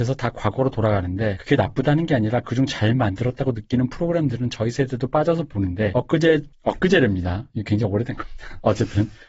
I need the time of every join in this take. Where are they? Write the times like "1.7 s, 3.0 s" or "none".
none